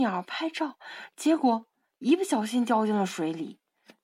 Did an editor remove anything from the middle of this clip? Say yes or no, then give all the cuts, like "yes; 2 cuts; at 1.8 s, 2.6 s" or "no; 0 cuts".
no; 0 cuts